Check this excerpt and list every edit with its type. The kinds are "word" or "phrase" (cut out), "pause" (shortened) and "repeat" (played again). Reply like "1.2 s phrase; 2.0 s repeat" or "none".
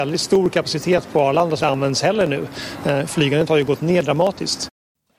1.6 s word